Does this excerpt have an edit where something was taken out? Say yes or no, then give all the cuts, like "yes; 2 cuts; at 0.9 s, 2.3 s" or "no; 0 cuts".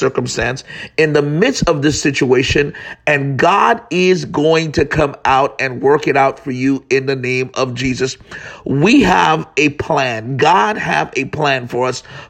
no; 0 cuts